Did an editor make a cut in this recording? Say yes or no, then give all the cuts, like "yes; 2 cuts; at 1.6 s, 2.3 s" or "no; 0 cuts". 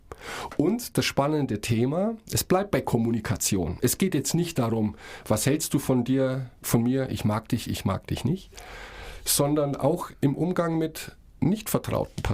yes; 1 cut; at 6.6 s